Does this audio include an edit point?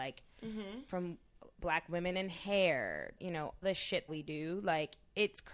yes; 4 cuts; at 1.5 s, 3.2 s, 3.6 s, 4.1 s

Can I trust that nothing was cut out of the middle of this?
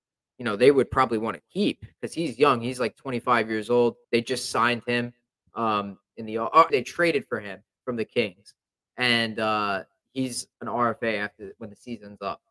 no; 3 cuts; at 4.0 s, 6.7 s, 10.5 s

